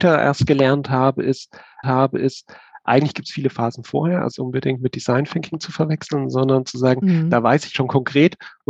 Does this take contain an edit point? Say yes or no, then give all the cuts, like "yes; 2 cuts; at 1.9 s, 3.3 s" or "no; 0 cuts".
yes; 3 cuts; at 1.8 s, 4.3 s, 7.7 s